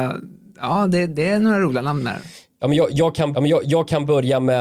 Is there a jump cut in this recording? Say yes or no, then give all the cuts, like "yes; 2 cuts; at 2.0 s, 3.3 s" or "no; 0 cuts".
yes; 1 cut; at 3.3 s